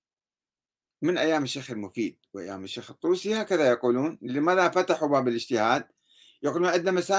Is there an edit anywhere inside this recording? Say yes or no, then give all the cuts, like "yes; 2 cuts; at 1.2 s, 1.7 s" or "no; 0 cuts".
no; 0 cuts